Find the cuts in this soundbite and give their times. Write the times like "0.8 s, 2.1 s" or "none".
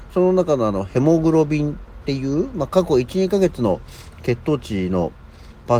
none